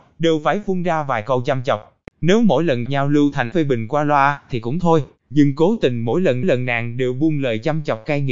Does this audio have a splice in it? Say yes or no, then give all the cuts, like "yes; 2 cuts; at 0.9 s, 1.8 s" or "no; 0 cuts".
yes; 3 cuts; at 2.9 s, 3.5 s, 6.4 s